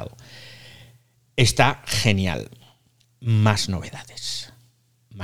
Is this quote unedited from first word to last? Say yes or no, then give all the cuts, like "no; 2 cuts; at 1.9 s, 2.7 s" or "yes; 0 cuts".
yes; 0 cuts